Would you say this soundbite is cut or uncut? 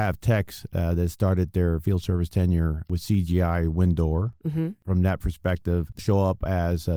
cut